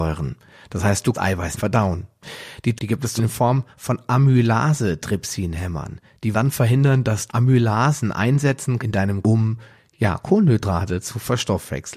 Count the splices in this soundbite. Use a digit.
8